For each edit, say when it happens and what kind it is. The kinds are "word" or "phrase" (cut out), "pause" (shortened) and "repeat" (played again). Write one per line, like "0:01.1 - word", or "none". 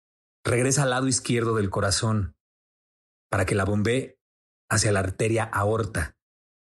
none